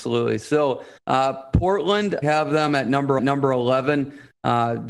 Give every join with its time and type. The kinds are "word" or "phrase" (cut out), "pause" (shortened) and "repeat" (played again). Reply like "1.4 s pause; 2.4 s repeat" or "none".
1.0 s pause; 2.2 s phrase; 3.2 s repeat